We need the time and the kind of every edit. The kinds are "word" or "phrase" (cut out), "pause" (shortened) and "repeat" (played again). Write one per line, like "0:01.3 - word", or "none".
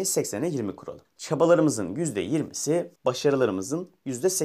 0:01.0 - pause
0:03.0 - pause